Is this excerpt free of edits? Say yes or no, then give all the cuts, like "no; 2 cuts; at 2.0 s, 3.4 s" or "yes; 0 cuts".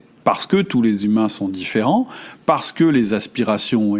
yes; 0 cuts